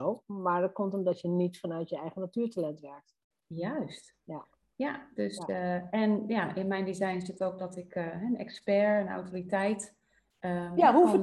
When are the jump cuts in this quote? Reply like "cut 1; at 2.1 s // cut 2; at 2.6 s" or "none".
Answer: none